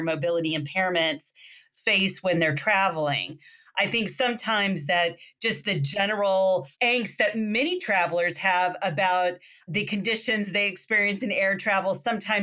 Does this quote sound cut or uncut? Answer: uncut